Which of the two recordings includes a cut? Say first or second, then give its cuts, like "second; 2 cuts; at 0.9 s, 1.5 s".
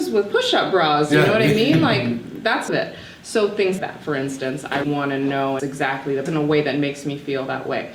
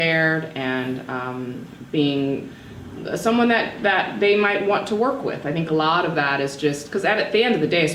first; 5 cuts; at 2.7 s, 3.8 s, 4.8 s, 5.6 s, 6.3 s